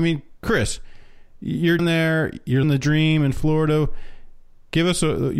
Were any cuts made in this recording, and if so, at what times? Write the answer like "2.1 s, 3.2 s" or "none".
1.8 s, 2.6 s

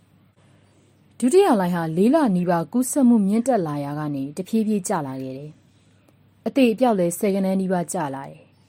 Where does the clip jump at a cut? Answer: none

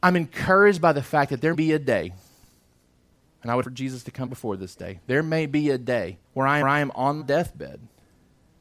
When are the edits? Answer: 1.5 s, 3.6 s, 4.3 s, 6.2 s, 6.6 s, 7.2 s

